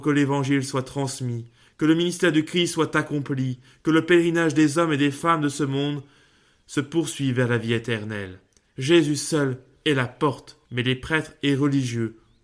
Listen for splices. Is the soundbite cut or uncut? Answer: cut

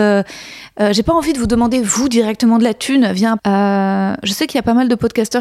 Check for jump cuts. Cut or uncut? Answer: cut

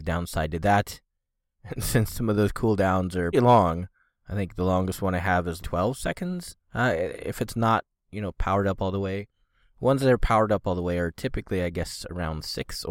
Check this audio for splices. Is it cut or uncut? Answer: cut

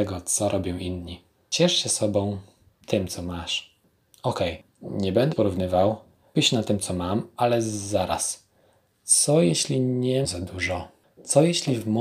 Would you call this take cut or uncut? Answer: cut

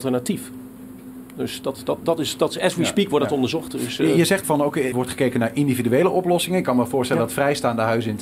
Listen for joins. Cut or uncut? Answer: cut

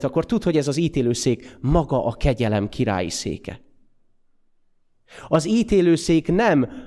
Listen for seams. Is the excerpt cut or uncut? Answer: uncut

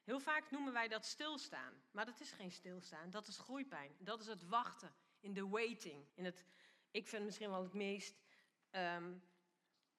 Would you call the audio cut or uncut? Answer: cut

